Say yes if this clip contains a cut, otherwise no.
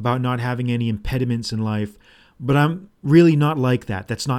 no